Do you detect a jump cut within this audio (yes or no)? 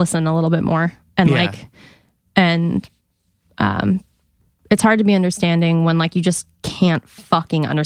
no